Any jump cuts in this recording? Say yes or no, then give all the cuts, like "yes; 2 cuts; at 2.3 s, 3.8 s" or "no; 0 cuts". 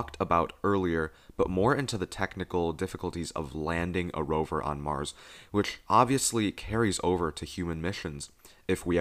no; 0 cuts